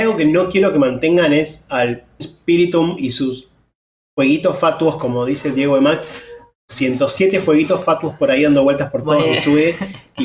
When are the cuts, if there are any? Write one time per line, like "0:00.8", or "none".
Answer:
0:02.2